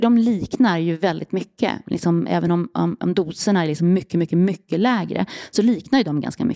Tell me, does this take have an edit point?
no; 0 cuts

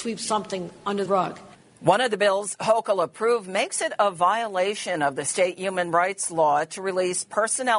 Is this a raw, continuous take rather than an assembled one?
no; 1 cut; at 1.1 s

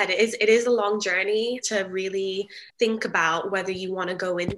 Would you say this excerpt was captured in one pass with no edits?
no; 2 cuts; at 1.6 s, 2.7 s

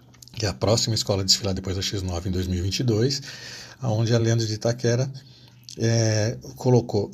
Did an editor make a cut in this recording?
no; 0 cuts

